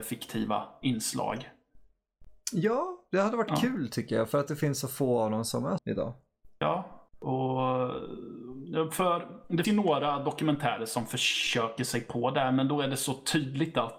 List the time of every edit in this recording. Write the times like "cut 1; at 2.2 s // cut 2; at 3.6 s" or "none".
cut 1; at 5.8 s // cut 2; at 7.1 s // cut 3; at 9.6 s